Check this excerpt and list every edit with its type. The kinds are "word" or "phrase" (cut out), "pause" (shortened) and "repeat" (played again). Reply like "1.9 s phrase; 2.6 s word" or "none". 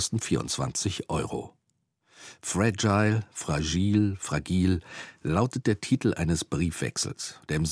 none